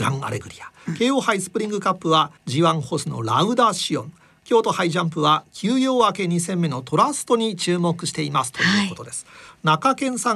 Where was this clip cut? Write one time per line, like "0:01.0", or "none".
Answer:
0:02.4